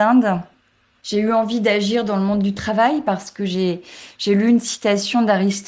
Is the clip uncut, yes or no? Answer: yes